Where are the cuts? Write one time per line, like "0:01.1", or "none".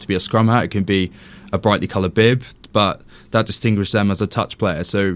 none

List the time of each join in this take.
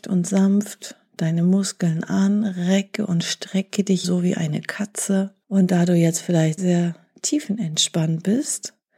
0:04.0
0:05.4
0:06.6

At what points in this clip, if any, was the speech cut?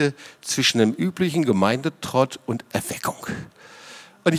none

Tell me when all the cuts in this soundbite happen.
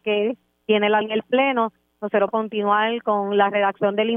0:01.0
0:02.3

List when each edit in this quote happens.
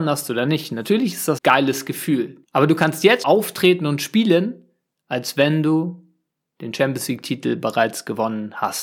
0:01.4
0:02.4
0:03.2

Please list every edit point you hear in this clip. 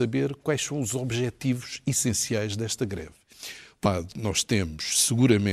0:03.9

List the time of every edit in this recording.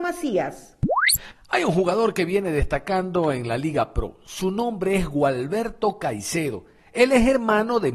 none

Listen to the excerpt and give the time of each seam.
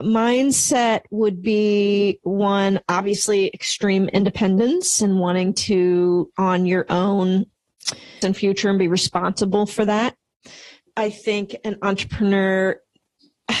0:06.3
0:08.2

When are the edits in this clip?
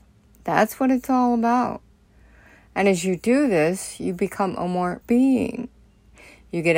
0:02.0
0:05.0

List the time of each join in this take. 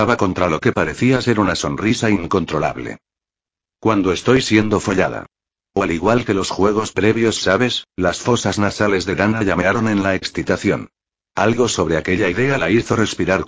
0:07.9

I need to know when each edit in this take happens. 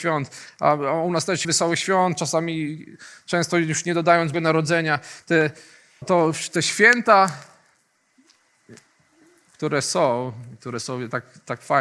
0:01.4
0:04.3
0:06.0

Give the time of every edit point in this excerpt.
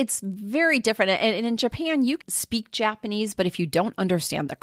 0:02.2

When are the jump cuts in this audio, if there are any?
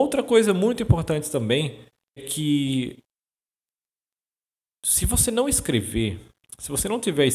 0:02.2

